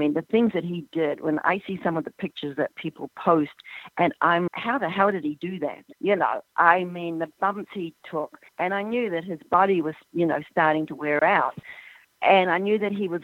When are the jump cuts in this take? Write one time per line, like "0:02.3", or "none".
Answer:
0:04.5
0:05.9
0:08.5
0:12.0